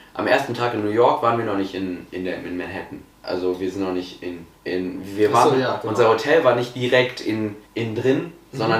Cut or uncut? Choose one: cut